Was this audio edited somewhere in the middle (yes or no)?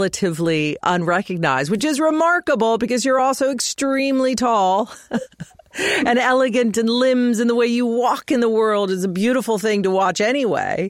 no